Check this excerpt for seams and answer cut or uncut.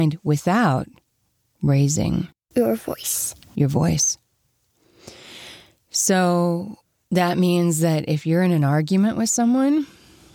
uncut